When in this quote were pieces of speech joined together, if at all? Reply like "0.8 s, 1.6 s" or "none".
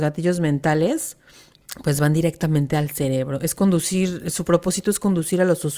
none